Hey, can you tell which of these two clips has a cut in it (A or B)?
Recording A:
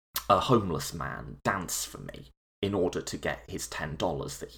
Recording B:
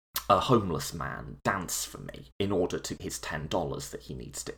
B